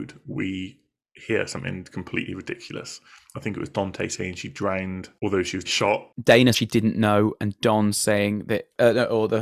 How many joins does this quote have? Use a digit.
2